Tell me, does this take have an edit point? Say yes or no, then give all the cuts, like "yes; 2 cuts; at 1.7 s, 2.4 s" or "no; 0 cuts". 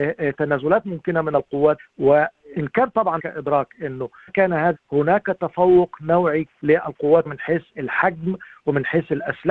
yes; 6 cuts; at 1.8 s, 3.2 s, 4.3 s, 4.7 s, 6.5 s, 7.3 s